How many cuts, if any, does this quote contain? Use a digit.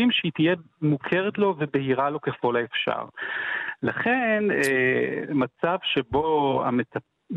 0